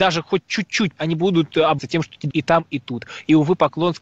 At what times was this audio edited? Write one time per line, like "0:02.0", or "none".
0:01.0
0:01.8
0:02.3